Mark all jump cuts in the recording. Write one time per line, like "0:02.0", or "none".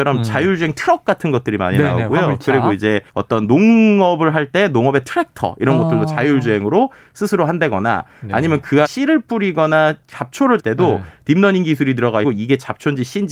0:03.1
0:08.8
0:10.6
0:12.2